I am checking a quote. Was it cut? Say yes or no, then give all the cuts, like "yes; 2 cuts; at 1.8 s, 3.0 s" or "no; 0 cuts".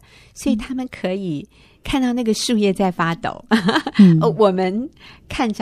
no; 0 cuts